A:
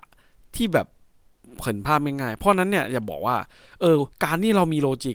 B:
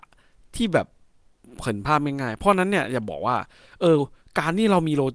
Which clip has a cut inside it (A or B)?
A